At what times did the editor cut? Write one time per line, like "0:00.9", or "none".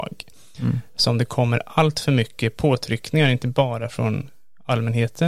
none